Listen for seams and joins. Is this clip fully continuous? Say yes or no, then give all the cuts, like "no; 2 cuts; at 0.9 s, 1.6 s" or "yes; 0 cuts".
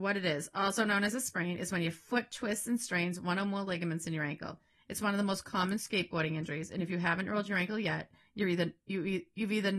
yes; 0 cuts